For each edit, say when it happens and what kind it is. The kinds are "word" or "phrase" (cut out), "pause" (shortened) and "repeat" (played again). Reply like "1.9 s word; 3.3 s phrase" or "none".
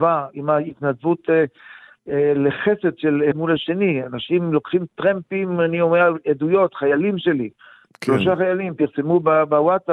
3.3 s word